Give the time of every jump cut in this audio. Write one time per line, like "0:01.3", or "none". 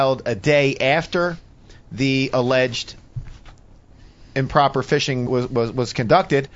0:05.3